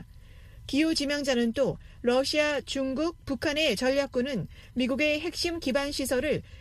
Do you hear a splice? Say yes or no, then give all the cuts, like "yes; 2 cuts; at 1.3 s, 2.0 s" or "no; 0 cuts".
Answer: no; 0 cuts